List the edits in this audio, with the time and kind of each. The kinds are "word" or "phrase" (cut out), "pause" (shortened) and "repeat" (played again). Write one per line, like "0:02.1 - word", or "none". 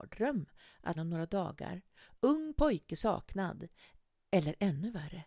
0:00.9 - phrase